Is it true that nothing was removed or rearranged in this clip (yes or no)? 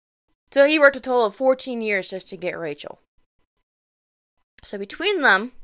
yes